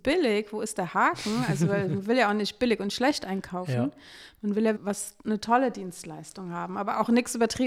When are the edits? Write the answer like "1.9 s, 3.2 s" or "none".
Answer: 4.8 s